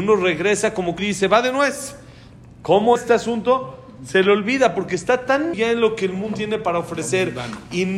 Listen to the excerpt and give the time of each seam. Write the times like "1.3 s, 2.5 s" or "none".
1.0 s, 3.0 s, 5.5 s, 6.3 s